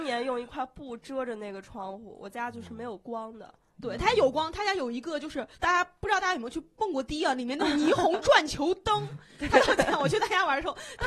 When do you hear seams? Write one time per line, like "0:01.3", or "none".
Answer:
0:05.5